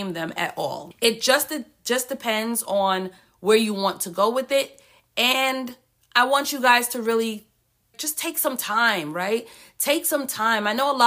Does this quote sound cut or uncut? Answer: uncut